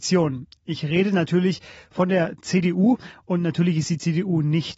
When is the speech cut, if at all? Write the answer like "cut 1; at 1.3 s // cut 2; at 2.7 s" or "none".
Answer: none